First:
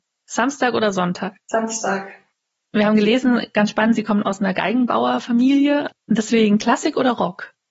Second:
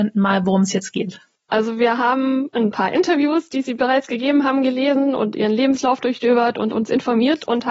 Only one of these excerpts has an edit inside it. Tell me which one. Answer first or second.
first